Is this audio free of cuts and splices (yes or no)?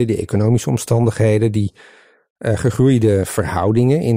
yes